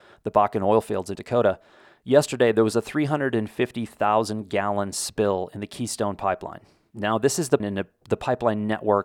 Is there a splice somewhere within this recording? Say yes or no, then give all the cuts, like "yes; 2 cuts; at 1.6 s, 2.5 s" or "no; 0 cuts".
yes; 2 cuts; at 1.2 s, 7.6 s